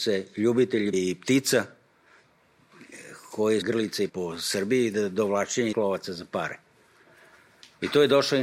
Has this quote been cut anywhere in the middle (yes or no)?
yes